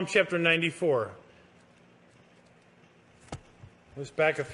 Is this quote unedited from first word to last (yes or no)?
yes